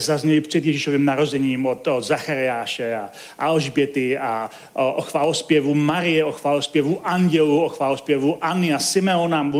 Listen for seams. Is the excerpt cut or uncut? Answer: uncut